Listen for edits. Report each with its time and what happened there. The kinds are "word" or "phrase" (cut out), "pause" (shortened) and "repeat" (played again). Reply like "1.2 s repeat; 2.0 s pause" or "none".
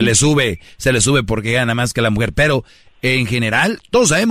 none